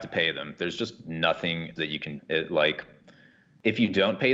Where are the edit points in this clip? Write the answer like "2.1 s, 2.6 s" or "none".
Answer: 1.8 s, 2.2 s

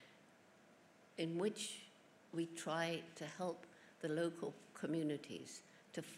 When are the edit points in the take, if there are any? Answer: none

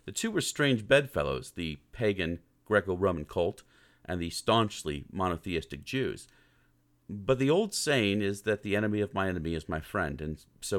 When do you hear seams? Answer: none

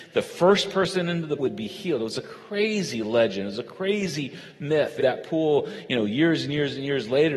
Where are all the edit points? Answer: 1.4 s, 5.0 s

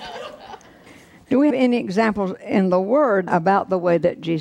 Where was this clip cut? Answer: 1.5 s, 3.3 s

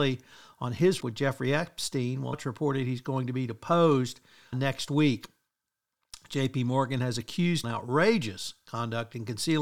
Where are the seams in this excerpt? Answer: 1.0 s, 2.3 s, 4.5 s, 7.6 s

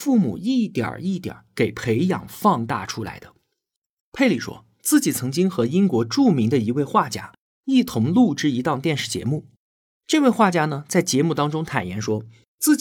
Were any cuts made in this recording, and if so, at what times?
none

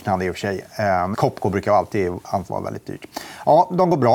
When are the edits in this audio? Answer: 1.1 s, 2.5 s

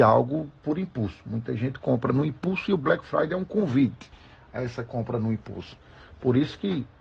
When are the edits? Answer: none

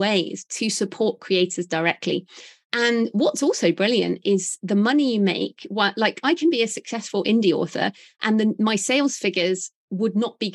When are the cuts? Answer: none

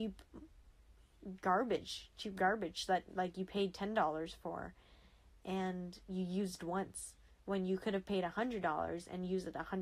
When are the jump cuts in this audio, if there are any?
none

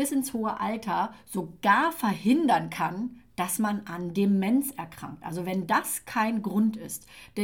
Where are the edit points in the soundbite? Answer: none

